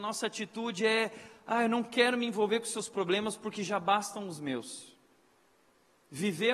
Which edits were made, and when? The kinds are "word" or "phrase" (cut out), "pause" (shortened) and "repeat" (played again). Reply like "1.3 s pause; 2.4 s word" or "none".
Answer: none